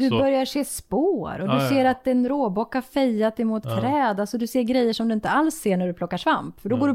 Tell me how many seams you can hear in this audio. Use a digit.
1